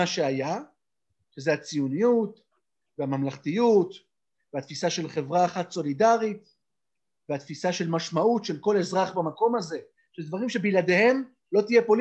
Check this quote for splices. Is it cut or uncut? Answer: uncut